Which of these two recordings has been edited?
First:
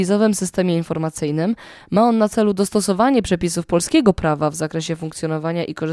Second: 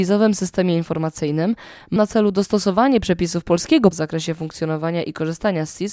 second; 2 cuts; at 2.0 s, 3.9 s

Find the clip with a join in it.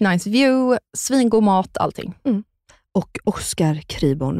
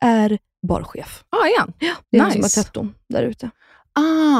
second; 2 cuts; at 1.3 s, 2.0 s

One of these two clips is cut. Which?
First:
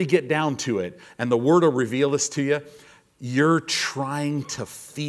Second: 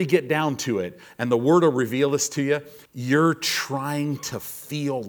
second; 1 cut; at 2.9 s

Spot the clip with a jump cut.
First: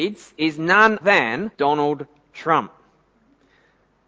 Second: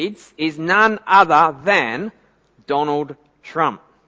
first; 2 cuts; at 1.0 s, 1.5 s

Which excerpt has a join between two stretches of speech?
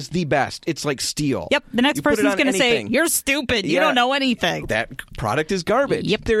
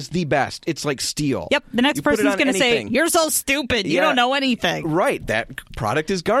first; 2 cuts; at 3.1 s, 4.6 s

